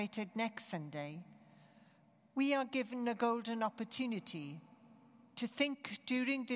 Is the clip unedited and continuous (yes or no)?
yes